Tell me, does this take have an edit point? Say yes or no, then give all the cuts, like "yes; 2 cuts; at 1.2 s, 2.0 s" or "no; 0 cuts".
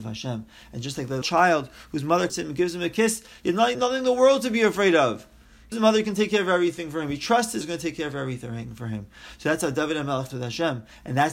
yes; 6 cuts; at 1.2 s, 2.3 s, 3.7 s, 5.7 s, 7.6 s, 10.3 s